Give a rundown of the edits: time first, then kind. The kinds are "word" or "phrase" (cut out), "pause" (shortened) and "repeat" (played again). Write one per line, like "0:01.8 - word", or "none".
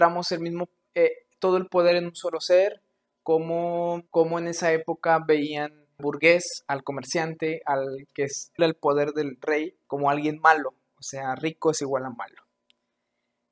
0:04.1 - pause
0:06.0 - word
0:08.6 - word
0:09.8 - pause